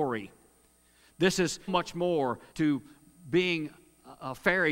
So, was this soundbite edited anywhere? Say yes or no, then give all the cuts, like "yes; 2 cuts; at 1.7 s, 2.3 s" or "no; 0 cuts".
yes; 2 cuts; at 1.7 s, 2.5 s